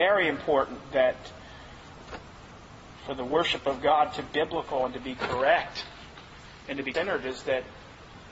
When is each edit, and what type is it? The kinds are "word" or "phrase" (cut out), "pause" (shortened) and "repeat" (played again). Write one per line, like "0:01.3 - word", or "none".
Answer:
0:04.2 - word
0:06.9 - word